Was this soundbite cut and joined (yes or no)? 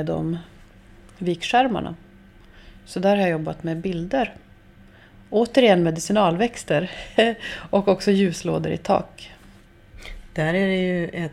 no